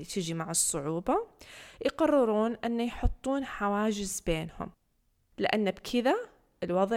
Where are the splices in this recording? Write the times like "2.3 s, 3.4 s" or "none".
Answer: none